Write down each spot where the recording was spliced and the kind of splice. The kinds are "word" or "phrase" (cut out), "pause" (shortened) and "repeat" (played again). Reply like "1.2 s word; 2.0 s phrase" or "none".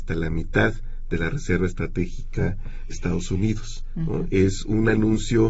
2.9 s word